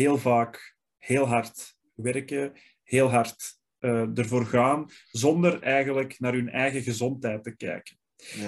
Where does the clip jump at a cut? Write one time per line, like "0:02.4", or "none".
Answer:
none